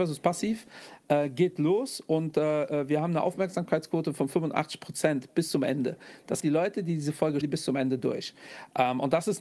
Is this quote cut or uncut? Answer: cut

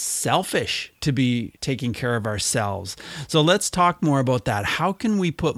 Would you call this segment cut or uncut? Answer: cut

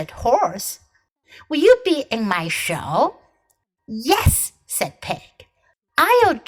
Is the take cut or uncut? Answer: uncut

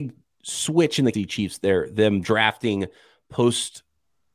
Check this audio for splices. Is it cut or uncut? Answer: cut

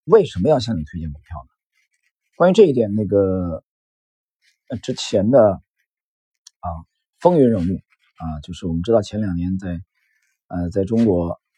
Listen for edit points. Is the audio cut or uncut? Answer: uncut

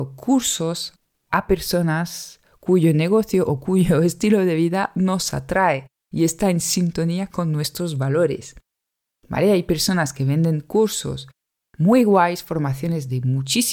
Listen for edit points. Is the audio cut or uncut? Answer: uncut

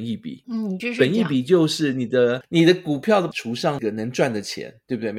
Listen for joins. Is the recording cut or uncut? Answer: cut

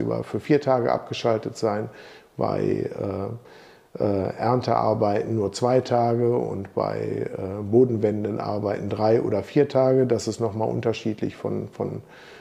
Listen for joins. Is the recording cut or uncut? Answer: uncut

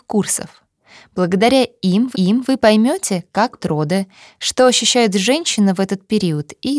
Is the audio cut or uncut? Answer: cut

